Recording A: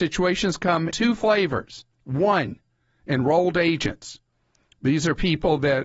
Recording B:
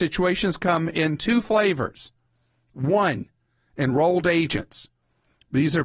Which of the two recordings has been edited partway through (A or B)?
A